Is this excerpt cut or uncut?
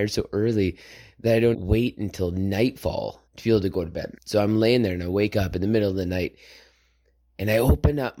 cut